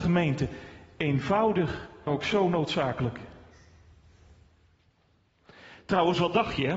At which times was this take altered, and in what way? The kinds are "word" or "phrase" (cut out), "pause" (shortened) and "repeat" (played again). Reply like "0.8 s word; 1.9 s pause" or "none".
2.1 s word